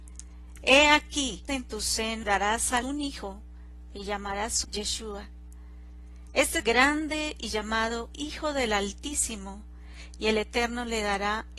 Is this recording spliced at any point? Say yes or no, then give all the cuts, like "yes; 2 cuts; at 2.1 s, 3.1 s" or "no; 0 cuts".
yes; 5 cuts; at 1.5 s, 2.2 s, 2.8 s, 4.6 s, 6.6 s